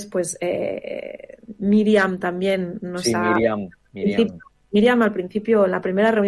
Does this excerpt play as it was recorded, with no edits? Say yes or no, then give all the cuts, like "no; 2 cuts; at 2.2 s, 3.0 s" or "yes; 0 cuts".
yes; 0 cuts